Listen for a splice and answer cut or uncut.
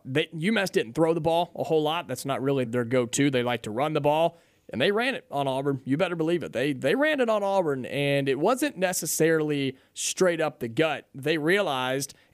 cut